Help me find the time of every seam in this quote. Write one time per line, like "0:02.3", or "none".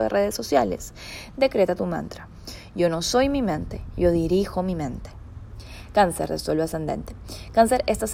none